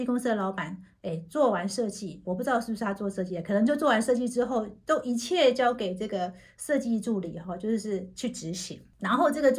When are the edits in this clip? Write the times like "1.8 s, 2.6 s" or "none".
2.2 s